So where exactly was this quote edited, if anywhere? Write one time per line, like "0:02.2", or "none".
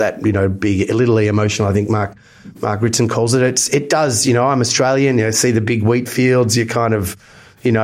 none